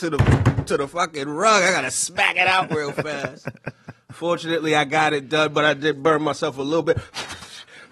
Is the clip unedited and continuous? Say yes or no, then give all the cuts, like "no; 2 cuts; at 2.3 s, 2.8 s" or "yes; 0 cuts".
yes; 0 cuts